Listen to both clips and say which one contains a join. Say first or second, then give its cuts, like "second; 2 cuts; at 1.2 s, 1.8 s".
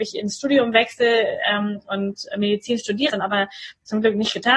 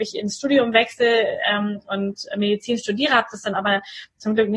first; 1 cut; at 3.1 s